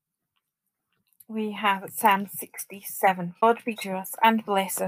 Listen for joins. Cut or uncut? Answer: cut